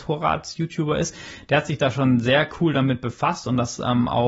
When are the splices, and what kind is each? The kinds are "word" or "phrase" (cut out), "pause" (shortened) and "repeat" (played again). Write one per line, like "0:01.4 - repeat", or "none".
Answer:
none